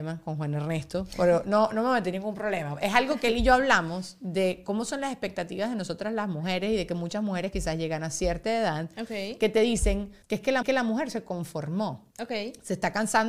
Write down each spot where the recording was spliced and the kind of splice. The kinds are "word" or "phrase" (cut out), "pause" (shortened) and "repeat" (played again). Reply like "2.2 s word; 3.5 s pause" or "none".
10.2 s pause; 10.6 s repeat; 12.1 s pause